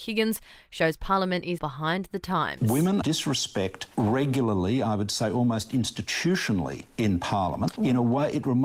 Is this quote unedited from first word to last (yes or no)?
no